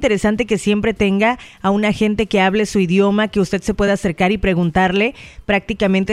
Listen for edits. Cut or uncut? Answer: uncut